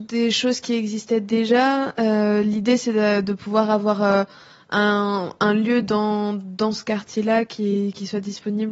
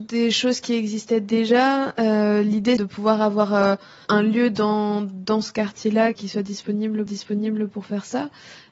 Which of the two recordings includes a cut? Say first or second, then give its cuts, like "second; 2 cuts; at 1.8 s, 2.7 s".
second; 4 cuts; at 2.8 s, 4.0 s, 6.1 s, 7.1 s